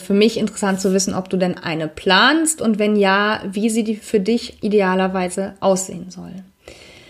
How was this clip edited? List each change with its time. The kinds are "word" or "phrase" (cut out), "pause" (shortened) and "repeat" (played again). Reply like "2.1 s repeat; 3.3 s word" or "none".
none